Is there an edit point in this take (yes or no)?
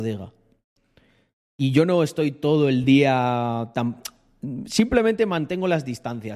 no